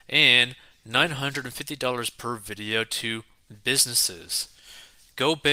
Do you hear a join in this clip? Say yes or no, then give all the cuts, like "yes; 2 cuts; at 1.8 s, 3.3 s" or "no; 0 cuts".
no; 0 cuts